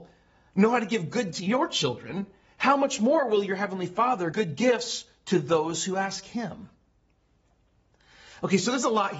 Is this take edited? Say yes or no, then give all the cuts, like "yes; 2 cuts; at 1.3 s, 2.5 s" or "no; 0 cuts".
yes; 2 cuts; at 1.3 s, 4.3 s